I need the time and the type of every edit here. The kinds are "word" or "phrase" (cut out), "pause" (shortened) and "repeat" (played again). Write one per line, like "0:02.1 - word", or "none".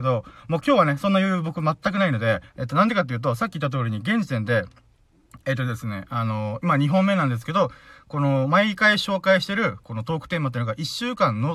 0:02.5 - pause